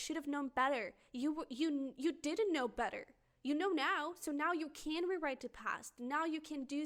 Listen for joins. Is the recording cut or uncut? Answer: uncut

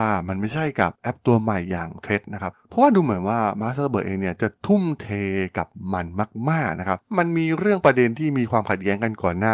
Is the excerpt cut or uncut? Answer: cut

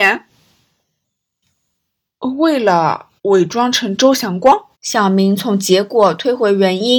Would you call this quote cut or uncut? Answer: cut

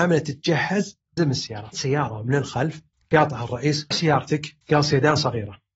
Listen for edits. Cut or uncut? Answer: cut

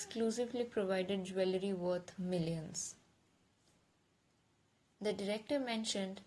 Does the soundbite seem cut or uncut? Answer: uncut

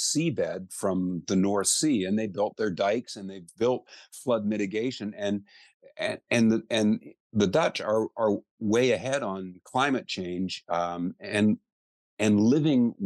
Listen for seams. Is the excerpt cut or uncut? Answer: uncut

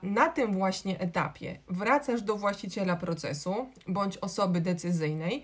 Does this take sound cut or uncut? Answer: uncut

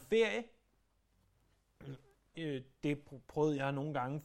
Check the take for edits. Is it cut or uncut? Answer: cut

